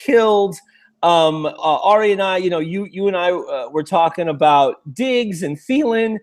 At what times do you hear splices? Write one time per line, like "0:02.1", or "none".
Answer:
0:01.6

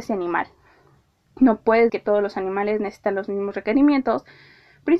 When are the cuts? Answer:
0:01.9

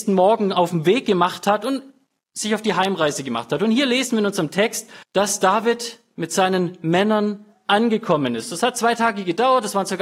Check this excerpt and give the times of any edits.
0:05.0

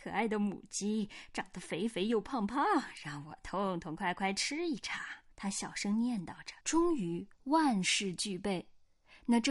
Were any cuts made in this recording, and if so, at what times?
0:05.3
0:06.6
0:07.3

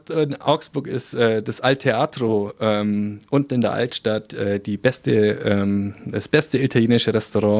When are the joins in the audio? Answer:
none

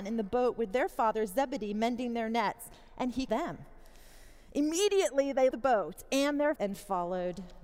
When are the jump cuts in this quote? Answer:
0:03.3
0:05.5
0:06.6

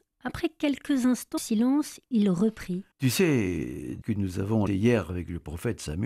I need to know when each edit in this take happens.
0:01.4
0:02.9
0:04.0
0:04.7

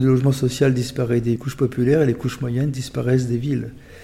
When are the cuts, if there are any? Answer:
0:01.4

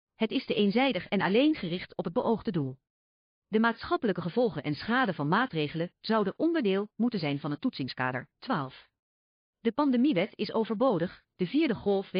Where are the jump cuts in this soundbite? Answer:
none

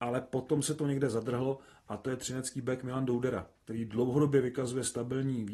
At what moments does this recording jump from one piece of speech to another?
none

